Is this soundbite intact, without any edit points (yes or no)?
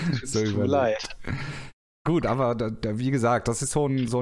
no